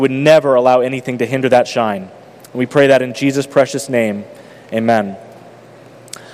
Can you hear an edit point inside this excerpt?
no; 0 cuts

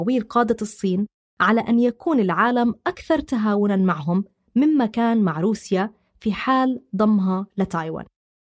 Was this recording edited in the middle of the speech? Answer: no; 0 cuts

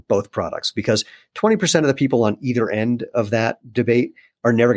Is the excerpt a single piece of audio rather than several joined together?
yes; 0 cuts

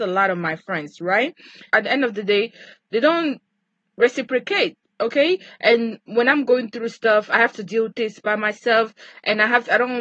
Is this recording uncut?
yes; 0 cuts

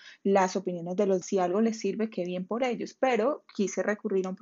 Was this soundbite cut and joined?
yes; 1 cut; at 1.2 s

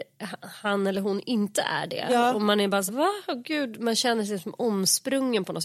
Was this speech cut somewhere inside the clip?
yes; 2 cuts; at 2.9 s, 3.8 s

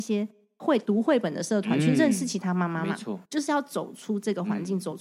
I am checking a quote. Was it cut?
yes; 1 cut; at 3.3 s

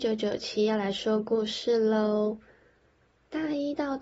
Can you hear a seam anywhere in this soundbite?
no; 0 cuts

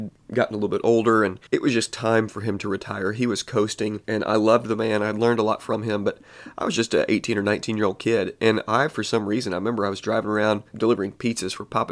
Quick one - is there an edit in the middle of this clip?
yes; 3 cuts; at 1.5 s, 4.0 s, 10.7 s

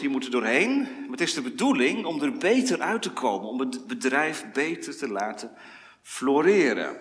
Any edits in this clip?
no; 0 cuts

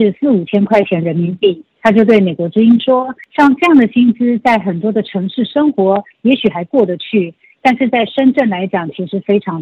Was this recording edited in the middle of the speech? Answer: no; 0 cuts

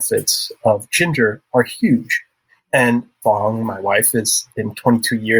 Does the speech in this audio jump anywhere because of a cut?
no; 0 cuts

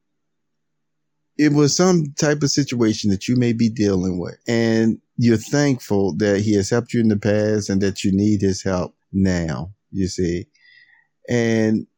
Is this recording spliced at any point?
yes; 2 cuts; at 4.4 s, 9.0 s

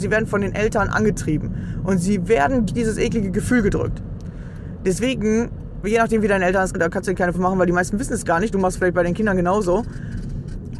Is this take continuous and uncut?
no; 4 cuts; at 2.7 s, 5.8 s, 6.7 s, 7.3 s

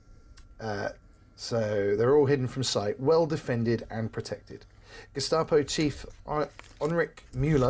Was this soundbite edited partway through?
no; 0 cuts

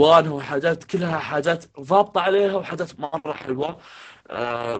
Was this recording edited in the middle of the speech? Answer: yes; 1 cut; at 1.7 s

